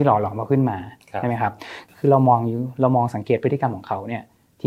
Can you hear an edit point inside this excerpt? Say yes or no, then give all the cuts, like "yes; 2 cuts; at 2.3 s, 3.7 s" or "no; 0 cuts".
no; 0 cuts